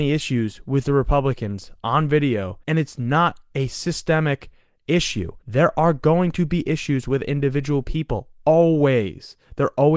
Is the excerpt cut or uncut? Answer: cut